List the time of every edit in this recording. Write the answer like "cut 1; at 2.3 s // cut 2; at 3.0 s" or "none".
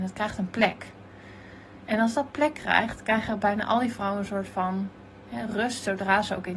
none